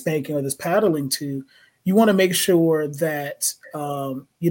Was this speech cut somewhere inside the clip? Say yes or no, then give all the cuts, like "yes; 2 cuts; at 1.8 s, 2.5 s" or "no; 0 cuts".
no; 0 cuts